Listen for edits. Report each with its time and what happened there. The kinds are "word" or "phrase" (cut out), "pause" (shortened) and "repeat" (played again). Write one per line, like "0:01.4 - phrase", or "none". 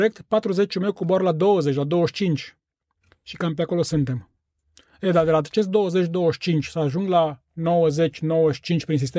none

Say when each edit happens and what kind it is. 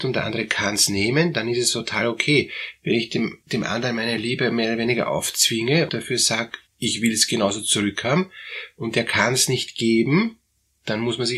0:03.4 - pause
0:05.9 - word
0:06.7 - pause

